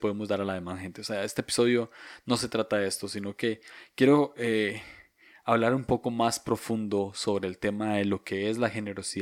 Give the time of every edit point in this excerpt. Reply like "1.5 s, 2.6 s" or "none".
none